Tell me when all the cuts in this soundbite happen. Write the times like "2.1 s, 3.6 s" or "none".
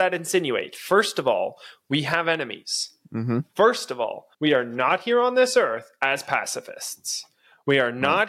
4.3 s